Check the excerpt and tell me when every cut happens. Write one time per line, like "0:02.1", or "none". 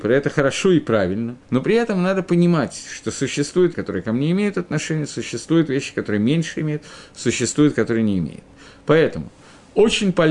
0:01.4
0:03.7